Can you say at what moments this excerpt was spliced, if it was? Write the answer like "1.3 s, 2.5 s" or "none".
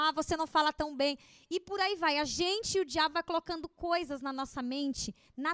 none